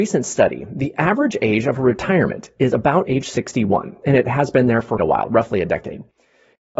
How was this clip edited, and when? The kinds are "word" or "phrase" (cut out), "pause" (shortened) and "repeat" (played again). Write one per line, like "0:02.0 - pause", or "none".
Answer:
0:05.0 - word